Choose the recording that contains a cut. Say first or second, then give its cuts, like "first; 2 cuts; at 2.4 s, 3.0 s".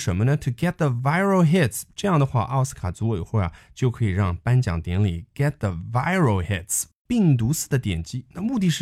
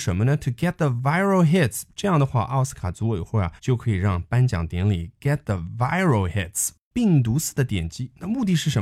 second; 1 cut; at 3.6 s